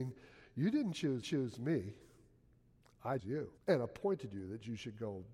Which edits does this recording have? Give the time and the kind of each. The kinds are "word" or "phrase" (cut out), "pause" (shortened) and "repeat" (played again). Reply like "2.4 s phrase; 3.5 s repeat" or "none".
1.2 s repeat; 3.2 s word; 3.6 s pause